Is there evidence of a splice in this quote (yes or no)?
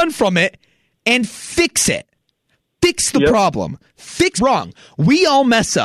yes